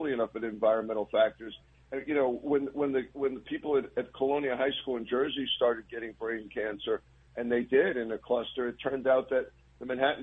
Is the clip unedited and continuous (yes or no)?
yes